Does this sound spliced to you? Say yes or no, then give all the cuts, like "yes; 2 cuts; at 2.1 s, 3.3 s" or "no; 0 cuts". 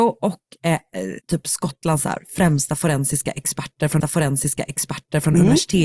yes; 2 cuts; at 1.2 s, 4.0 s